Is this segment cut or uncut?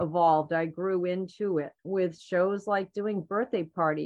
cut